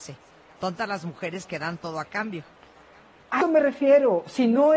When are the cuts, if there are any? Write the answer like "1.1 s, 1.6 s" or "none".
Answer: 3.4 s